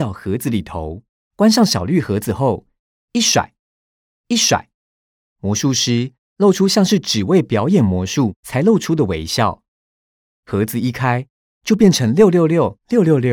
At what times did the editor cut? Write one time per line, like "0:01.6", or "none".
0:01.1
0:04.1